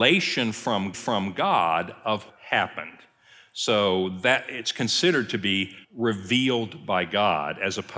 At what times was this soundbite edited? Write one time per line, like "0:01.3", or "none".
0:00.9
0:02.3
0:05.8